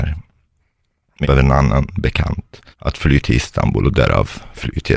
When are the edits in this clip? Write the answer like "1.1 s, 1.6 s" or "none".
1.2 s, 2.7 s

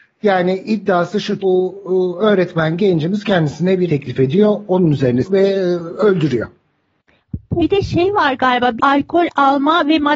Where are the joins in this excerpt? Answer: 1.4 s, 3.9 s, 5.2 s, 7.6 s, 8.8 s

